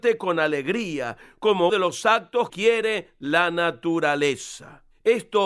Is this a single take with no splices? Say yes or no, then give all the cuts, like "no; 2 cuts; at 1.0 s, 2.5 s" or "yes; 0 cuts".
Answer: no; 2 cuts; at 1.7 s, 2.5 s